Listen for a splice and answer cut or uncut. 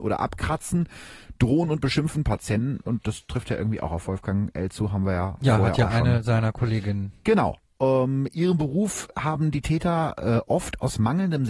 uncut